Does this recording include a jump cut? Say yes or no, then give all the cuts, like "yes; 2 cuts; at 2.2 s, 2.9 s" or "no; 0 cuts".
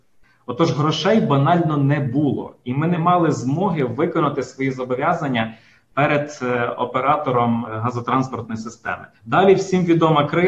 yes; 1 cut; at 9.1 s